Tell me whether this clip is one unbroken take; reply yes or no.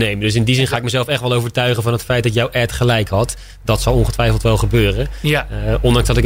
yes